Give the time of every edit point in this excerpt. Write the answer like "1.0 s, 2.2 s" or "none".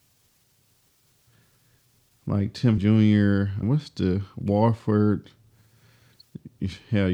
2.8 s, 3.6 s

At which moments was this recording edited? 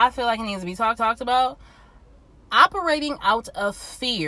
1.0 s

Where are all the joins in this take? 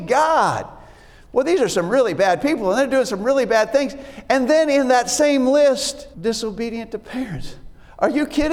6.1 s

